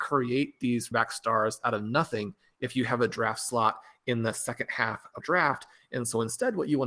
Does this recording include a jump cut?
yes; 2 cuts; at 0.9 s, 5.2 s

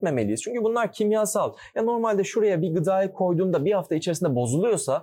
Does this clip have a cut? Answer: no; 0 cuts

